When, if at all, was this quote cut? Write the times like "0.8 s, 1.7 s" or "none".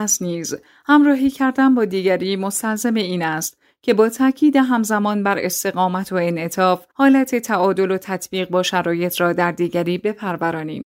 6.9 s